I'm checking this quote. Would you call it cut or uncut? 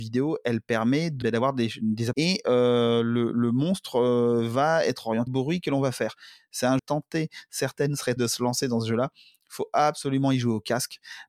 cut